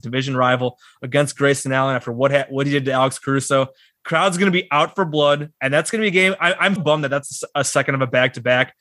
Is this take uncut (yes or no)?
no